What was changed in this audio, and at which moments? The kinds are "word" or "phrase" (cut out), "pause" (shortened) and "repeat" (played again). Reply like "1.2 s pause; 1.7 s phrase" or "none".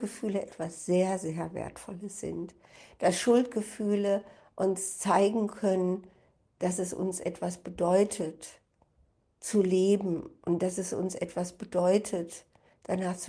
none